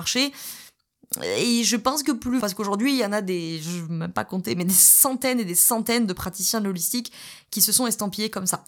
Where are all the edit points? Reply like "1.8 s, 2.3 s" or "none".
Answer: 2.4 s